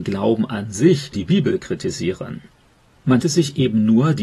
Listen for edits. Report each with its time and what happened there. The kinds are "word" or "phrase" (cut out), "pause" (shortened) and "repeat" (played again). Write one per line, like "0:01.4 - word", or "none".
0:01.1 - word
0:03.2 - word